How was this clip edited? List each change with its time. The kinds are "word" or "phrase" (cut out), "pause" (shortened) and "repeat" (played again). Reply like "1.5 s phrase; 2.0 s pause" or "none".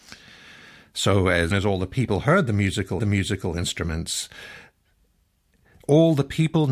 1.5 s word; 3.0 s repeat